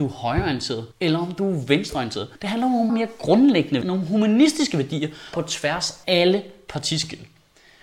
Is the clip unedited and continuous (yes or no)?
no